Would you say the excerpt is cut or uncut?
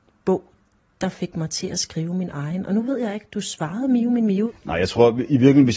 uncut